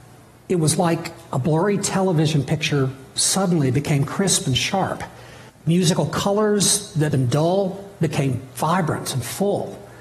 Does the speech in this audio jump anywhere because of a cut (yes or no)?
yes